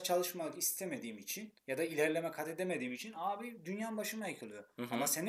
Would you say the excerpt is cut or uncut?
cut